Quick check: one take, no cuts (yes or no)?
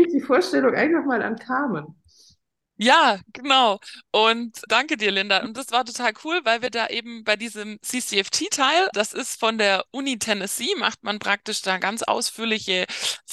no